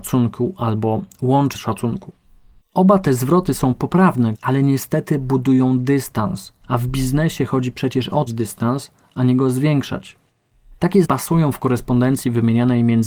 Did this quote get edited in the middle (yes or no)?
yes